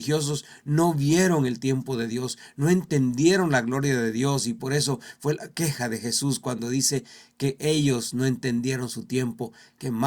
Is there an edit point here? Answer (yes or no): no